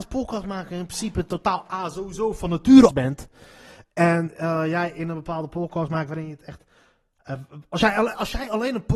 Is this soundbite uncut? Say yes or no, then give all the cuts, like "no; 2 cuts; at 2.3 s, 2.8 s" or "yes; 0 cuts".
no; 1 cut; at 2.9 s